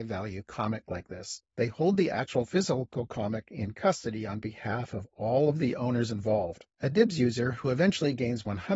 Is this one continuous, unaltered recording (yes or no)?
no